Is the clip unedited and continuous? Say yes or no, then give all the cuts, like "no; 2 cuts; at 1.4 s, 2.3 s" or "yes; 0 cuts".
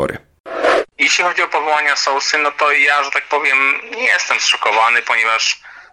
no; 1 cut; at 0.9 s